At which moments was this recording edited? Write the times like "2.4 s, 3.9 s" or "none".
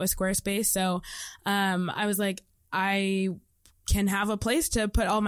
none